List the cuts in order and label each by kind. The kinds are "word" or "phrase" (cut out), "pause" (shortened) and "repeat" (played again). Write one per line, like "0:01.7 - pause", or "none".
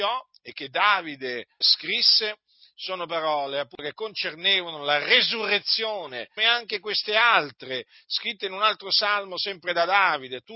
0:01.6 - word
0:06.4 - phrase